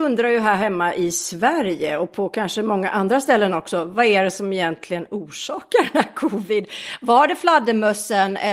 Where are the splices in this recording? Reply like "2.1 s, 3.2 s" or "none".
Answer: none